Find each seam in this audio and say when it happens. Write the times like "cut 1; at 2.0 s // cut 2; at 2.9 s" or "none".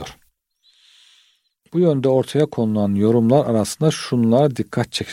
none